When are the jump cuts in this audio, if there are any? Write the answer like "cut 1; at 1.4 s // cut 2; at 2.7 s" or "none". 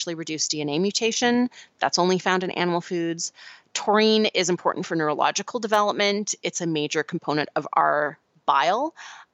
none